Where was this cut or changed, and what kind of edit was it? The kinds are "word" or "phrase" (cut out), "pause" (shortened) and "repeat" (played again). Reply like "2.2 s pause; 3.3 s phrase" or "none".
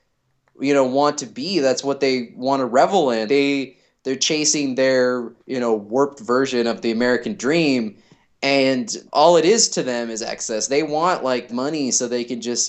3.3 s word; 5.4 s pause; 9.1 s pause; 11.5 s phrase